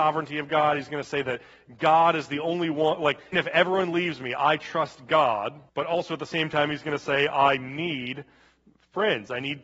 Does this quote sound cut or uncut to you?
cut